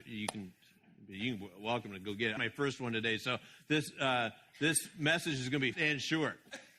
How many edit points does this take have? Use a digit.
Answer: 2